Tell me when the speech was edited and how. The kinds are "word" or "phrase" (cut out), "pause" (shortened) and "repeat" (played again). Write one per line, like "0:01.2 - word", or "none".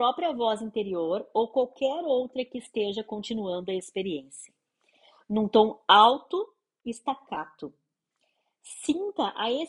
none